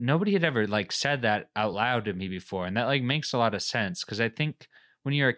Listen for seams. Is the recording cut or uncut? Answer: uncut